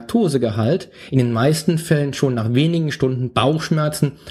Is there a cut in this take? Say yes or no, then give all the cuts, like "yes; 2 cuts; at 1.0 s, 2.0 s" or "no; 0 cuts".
no; 0 cuts